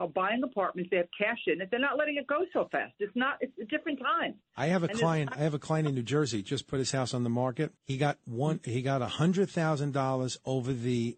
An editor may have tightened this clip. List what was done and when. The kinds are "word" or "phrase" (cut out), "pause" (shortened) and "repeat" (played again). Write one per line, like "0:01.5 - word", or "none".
0:07.8 - pause